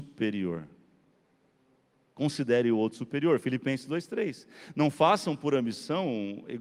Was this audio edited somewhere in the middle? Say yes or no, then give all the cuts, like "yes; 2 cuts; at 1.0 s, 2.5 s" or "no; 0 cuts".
no; 0 cuts